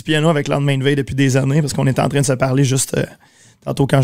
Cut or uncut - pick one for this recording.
uncut